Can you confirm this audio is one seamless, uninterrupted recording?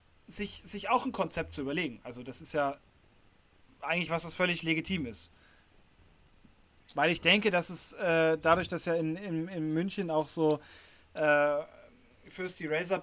yes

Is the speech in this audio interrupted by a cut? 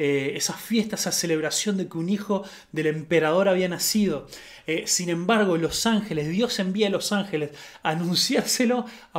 no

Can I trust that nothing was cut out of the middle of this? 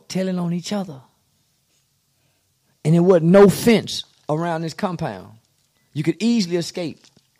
yes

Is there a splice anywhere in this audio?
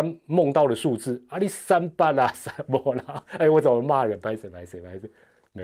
no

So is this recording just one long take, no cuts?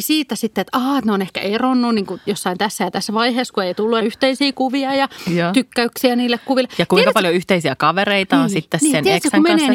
no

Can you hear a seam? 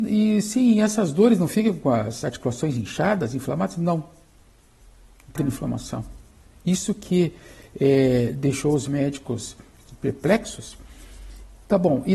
yes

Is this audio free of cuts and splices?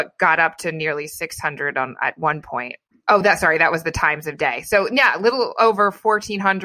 yes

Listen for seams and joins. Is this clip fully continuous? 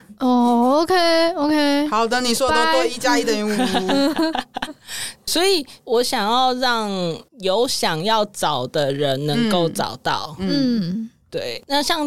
no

